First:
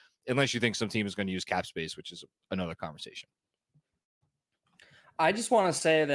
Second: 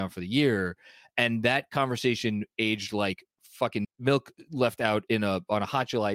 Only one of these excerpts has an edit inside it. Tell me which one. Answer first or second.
second